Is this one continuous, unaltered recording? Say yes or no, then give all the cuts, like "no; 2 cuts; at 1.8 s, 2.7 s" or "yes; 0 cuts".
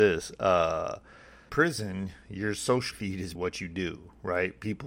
no; 3 cuts; at 1.5 s, 2.9 s, 3.3 s